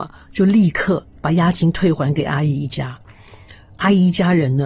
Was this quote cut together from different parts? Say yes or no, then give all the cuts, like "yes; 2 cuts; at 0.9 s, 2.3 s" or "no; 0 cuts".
no; 0 cuts